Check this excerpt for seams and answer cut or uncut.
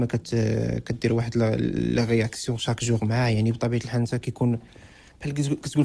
uncut